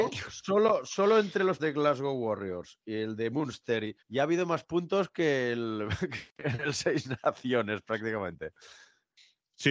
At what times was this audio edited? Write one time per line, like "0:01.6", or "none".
0:01.6
0:04.0